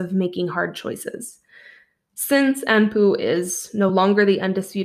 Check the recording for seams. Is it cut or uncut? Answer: uncut